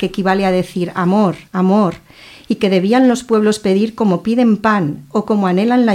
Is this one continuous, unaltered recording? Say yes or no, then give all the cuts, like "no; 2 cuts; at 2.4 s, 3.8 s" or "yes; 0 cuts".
no; 1 cut; at 1.5 s